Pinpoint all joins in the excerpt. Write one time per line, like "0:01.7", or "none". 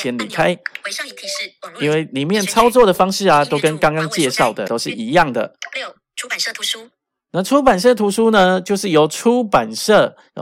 0:04.7